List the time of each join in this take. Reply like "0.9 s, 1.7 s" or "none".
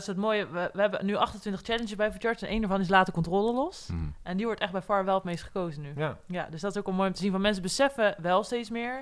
none

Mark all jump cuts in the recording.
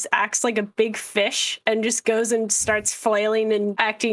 none

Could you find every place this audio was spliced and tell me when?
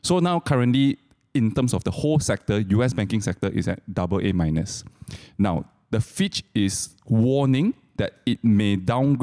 none

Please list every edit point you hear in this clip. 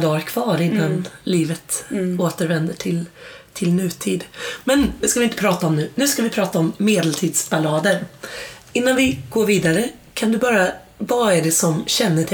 none

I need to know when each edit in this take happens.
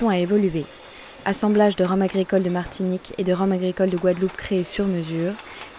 none

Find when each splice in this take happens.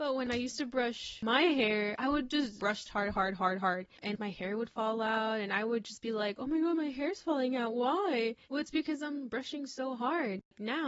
8.4 s

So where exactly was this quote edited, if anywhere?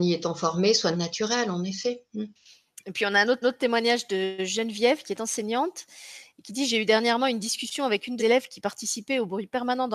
0.9 s, 3.4 s, 8.2 s

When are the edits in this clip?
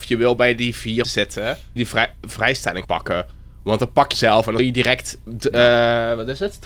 1.0 s, 1.8 s, 2.8 s, 4.1 s, 4.6 s

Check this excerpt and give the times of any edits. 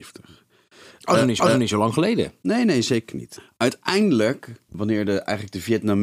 1.4 s

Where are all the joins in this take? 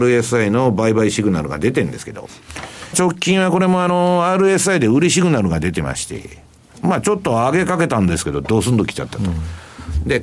2.9 s

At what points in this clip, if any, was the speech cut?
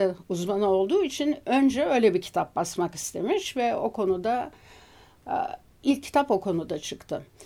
none

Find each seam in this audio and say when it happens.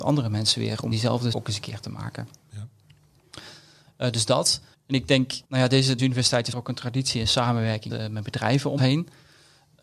0.9 s, 1.3 s, 4.7 s, 5.4 s, 6.0 s, 6.5 s, 7.9 s, 8.8 s

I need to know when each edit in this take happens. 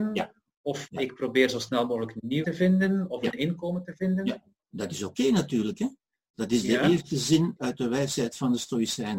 2.4 s, 4.6 s, 7.6 s

